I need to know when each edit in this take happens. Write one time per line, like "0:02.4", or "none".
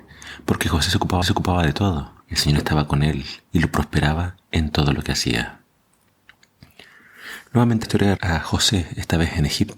0:01.2
0:02.2
0:03.4
0:04.4
0:07.8
0:08.2

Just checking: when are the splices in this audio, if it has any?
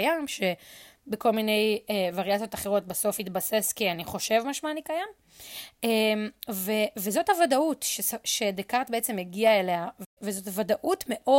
none

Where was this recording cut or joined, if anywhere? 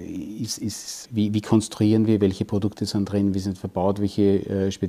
0:01.0

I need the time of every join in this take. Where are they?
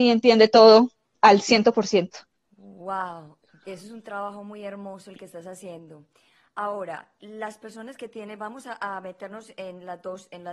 none

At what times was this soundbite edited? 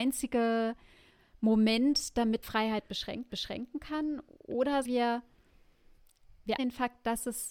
0:02.4
0:03.3
0:04.8
0:06.6

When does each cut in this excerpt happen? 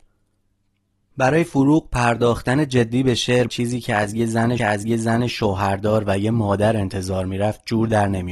0:03.5
0:04.6

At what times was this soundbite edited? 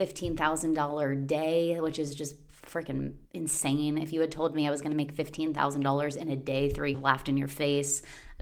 0:03.3
0:06.9

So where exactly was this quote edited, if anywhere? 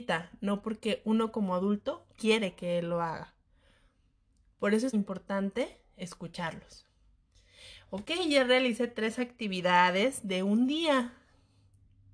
0:04.9

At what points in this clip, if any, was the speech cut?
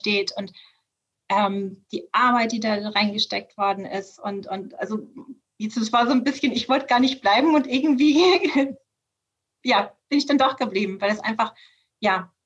0:05.4

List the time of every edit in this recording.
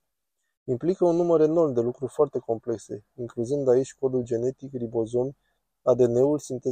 none

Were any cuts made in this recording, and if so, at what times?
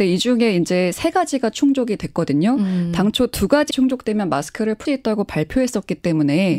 0:03.7
0:04.8

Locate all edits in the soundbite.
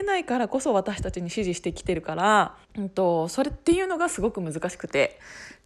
0:02.6

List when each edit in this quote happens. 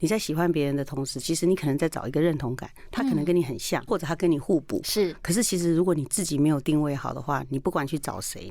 0:03.9

